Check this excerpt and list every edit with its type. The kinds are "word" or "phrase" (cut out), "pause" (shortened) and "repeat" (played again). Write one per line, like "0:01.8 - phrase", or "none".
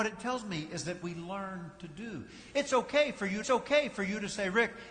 0:01.0 - phrase
0:03.4 - repeat